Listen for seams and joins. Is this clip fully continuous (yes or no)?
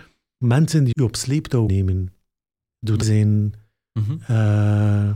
no